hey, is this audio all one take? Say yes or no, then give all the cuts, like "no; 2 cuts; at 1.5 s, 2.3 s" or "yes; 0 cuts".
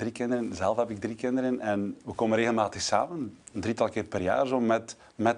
yes; 0 cuts